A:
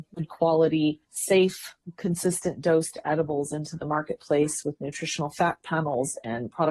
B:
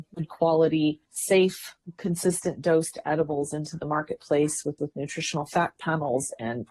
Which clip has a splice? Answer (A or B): B